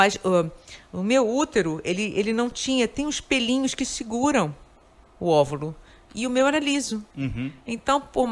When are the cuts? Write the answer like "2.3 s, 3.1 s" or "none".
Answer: none